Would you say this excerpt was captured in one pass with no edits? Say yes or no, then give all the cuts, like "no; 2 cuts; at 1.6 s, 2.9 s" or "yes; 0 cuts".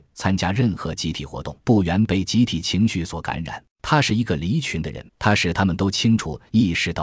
no; 3 cuts; at 1.6 s, 3.7 s, 5.1 s